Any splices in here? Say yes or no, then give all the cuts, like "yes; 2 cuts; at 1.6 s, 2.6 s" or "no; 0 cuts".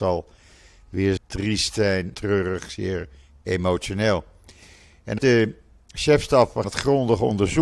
yes; 4 cuts; at 1.2 s, 2.1 s, 5.2 s, 6.6 s